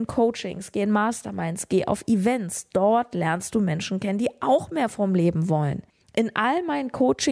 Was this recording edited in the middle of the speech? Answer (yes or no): yes